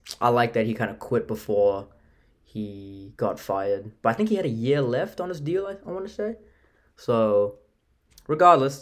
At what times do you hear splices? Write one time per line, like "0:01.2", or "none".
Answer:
none